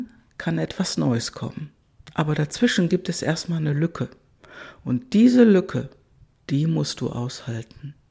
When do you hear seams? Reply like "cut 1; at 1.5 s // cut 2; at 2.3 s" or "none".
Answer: none